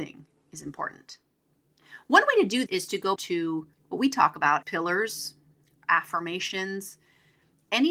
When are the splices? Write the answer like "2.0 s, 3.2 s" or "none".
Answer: 2.7 s, 3.2 s, 3.7 s, 4.6 s